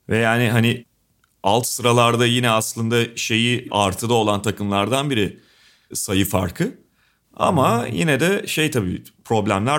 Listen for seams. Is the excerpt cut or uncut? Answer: uncut